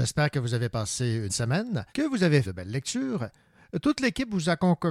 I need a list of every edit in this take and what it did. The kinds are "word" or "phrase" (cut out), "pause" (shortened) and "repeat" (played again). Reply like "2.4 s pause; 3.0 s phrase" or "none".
1.3 s phrase; 1.9 s pause; 2.4 s word

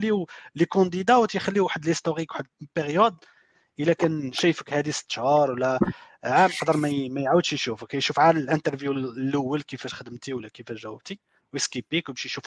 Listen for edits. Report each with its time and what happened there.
none

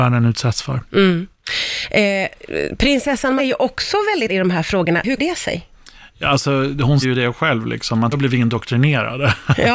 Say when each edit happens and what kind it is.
3.4 s word; 4.3 s word; 5.2 s word; 7.0 s word; 8.1 s word

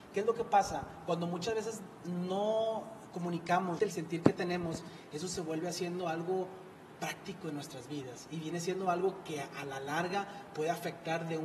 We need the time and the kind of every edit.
3.8 s word

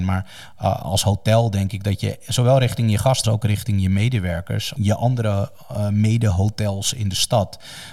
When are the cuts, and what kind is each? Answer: 3.2 s word; 4.7 s phrase

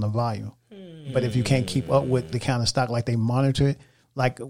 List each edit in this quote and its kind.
2.3 s word

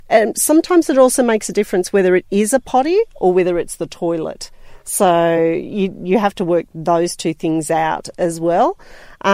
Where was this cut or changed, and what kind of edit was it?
none

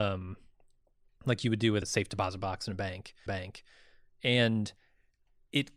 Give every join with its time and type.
1.8 s word; 3.3 s repeat

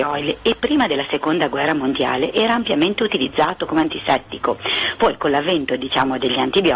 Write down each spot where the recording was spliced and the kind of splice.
none

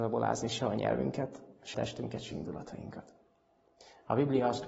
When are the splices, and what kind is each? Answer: 1.7 s word; 2.3 s word

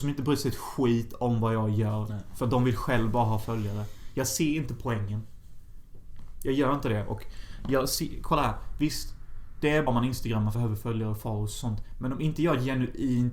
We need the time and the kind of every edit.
9.9 s word; 10.5 s word

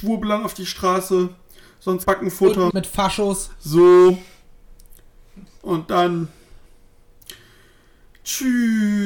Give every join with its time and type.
2.0 s word; 2.7 s word

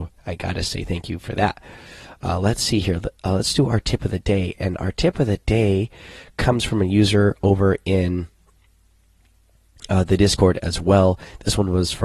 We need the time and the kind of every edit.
none

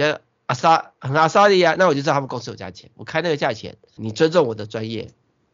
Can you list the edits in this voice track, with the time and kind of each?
4.0 s word

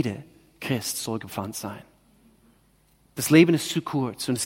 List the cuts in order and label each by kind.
none

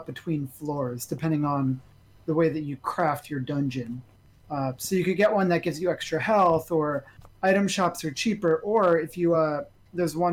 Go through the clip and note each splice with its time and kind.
none

